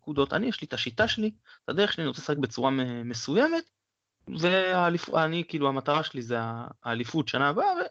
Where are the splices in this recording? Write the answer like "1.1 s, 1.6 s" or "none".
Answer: none

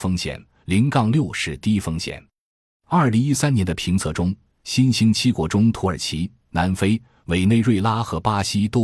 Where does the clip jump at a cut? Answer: none

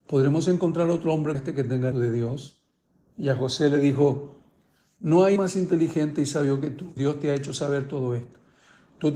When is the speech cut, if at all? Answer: 1.3 s, 1.9 s, 5.4 s, 7.0 s

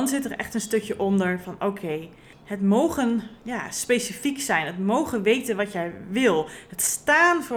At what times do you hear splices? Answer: 2.3 s

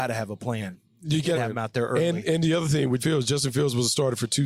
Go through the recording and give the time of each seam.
1.3 s, 3.0 s

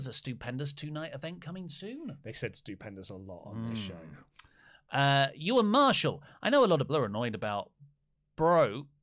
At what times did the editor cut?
6.9 s

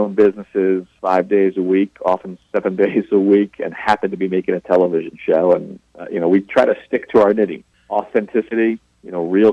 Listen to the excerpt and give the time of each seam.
1.0 s

